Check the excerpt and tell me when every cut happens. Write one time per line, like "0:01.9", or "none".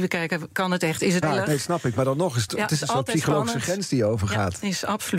0:01.2
0:02.5